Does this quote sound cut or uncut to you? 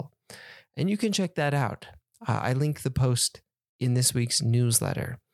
uncut